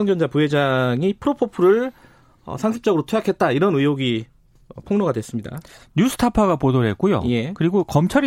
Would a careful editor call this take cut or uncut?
uncut